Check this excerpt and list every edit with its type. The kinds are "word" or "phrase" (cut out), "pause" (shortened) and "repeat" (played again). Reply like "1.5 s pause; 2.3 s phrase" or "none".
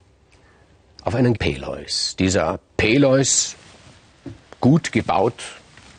1.4 s word; 2.7 s pause